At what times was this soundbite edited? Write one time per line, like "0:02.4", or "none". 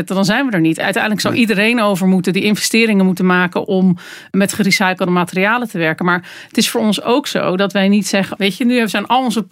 0:08.4